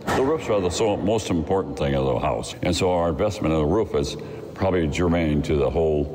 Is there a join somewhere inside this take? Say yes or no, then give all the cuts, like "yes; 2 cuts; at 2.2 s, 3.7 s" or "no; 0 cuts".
no; 0 cuts